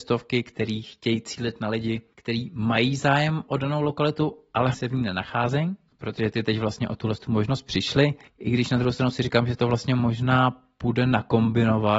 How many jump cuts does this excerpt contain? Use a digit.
1